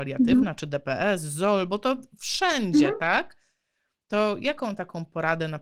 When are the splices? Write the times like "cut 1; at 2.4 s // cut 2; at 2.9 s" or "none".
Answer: none